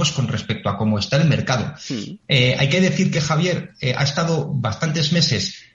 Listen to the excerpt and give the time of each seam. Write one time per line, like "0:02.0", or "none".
none

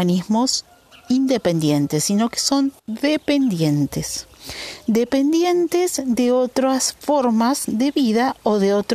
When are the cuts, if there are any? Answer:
0:02.8

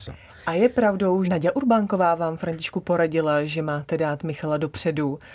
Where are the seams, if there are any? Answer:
0:01.2

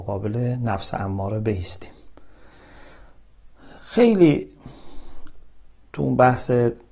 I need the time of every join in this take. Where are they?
0:03.8

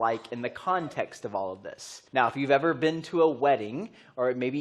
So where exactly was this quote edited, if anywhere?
0:02.1

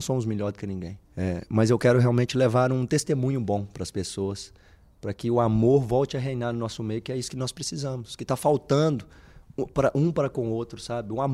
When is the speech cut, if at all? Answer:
0:01.0

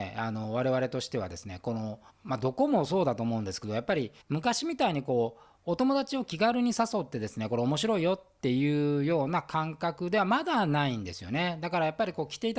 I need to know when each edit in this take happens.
0:02.1
0:04.2

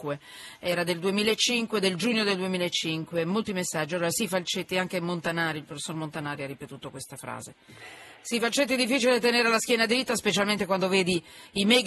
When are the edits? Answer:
none

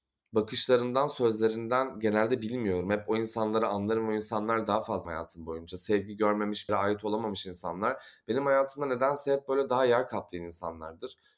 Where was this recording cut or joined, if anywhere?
0:05.0
0:06.7

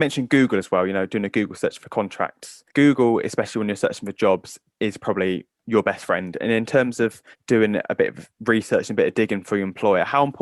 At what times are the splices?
0:02.7
0:07.3

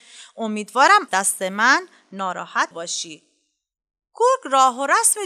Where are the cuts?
0:01.1
0:02.7

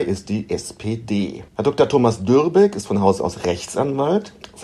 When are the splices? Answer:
0:01.5

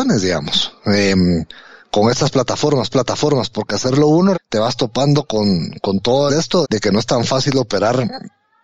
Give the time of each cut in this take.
0:02.9
0:04.3
0:06.3
0:06.6

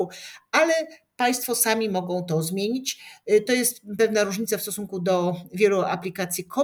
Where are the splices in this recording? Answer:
none

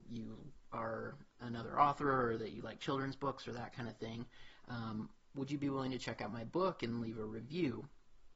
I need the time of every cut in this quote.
none

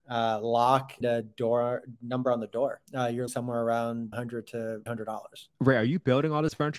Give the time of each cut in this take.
0:01.0
0:02.9
0:03.3
0:04.1
0:04.9
0:05.5

